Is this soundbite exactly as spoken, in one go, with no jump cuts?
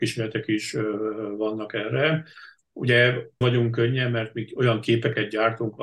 no; 1 cut; at 3.4 s

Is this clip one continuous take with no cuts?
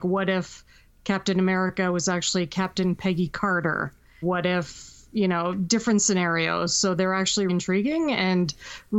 no; 2 cuts; at 4.2 s, 7.5 s

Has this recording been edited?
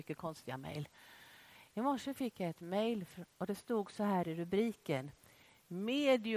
no; 0 cuts

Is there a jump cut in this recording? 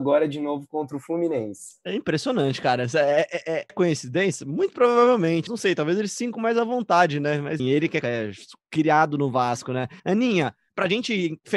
yes; 6 cuts; at 3.7 s, 5.5 s, 6.3 s, 7.6 s, 8.0 s, 10.0 s

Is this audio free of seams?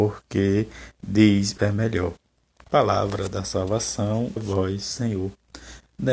no; 2 cuts; at 1.6 s, 4.4 s

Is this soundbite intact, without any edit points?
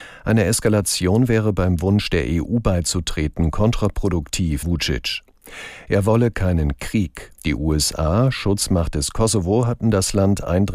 no; 2 cuts; at 4.6 s, 7.4 s

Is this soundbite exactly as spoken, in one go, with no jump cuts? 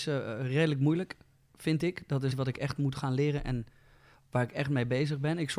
no; 1 cut; at 2.3 s

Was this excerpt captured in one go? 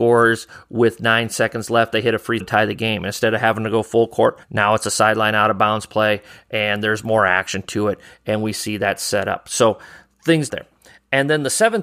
no; 3 cuts; at 2.4 s, 4.4 s, 10.5 s

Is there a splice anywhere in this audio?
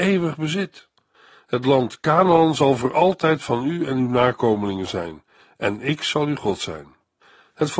no; 0 cuts

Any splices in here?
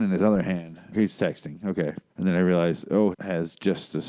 yes; 3 cuts; at 0.9 s, 2.1 s, 3.1 s

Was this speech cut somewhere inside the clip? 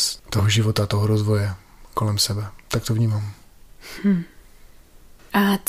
no; 0 cuts

